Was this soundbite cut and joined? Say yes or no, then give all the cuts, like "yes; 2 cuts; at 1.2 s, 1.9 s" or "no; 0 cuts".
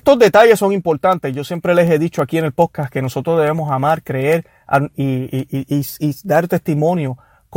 no; 0 cuts